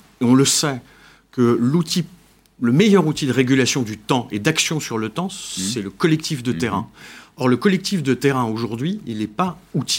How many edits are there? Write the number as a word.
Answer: zero